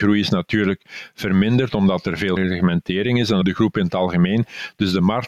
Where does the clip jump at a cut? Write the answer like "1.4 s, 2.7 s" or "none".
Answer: 2.4 s, 3.4 s